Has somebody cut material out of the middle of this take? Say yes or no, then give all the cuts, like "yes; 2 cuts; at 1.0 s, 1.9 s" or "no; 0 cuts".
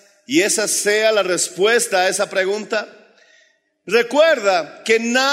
no; 0 cuts